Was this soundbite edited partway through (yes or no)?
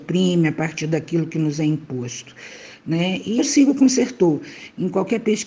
yes